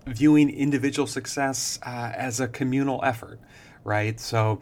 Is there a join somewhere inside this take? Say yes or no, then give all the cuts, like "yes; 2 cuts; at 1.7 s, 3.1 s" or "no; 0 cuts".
no; 0 cuts